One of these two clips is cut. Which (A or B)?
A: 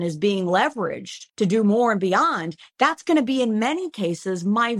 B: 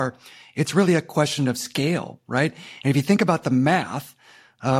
A